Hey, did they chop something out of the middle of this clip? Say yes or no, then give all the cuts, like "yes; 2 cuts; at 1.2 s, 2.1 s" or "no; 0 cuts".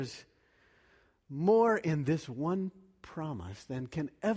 no; 0 cuts